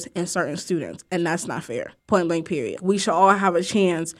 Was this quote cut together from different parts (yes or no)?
yes